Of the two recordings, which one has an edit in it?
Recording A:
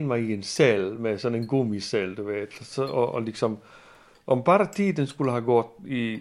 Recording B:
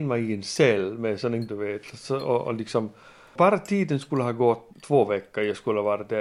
B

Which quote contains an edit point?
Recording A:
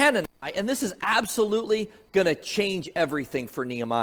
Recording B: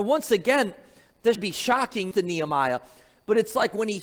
B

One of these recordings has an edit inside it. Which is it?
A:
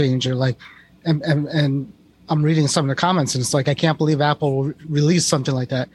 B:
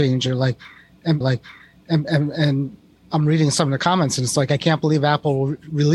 B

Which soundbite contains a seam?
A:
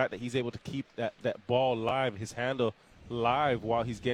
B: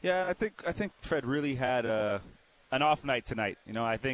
B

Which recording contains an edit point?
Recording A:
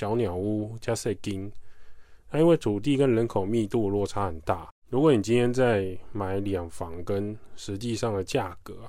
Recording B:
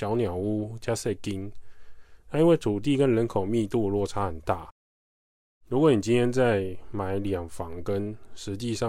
A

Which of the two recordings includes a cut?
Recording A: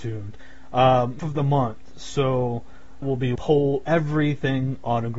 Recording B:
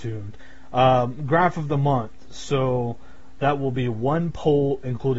A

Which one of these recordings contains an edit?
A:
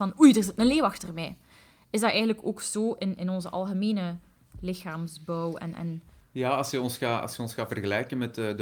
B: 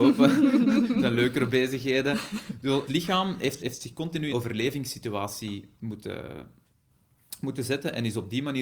B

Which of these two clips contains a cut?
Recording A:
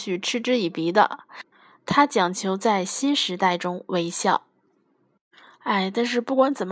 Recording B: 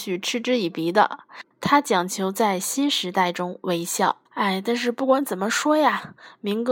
B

